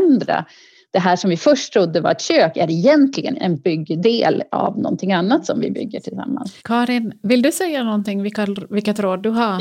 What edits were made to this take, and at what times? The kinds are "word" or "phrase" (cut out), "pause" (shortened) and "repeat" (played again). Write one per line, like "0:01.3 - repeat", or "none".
0:06.6 - pause